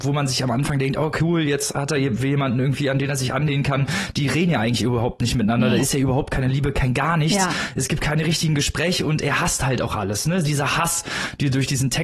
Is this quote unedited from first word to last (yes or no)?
yes